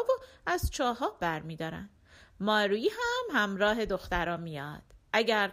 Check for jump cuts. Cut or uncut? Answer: cut